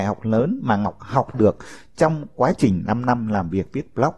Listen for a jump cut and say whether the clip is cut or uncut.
cut